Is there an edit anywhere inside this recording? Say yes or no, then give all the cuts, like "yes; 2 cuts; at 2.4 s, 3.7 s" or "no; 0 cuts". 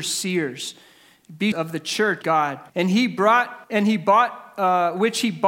yes; 4 cuts; at 1.5 s, 2.2 s, 2.7 s, 3.6 s